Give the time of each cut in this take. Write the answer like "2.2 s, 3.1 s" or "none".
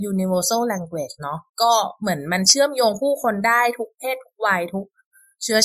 1.5 s